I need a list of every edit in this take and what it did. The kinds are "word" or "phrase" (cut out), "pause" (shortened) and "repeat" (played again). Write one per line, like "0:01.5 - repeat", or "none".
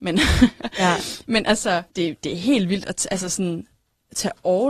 0:01.9 - pause